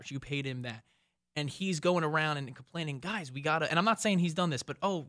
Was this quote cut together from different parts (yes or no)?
no